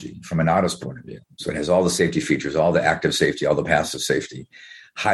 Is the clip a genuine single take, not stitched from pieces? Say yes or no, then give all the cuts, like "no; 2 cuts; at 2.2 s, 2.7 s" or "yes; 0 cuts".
yes; 0 cuts